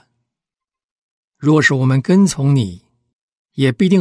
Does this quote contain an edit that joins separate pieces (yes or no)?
no